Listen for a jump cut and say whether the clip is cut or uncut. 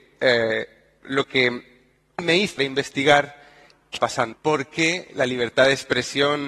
cut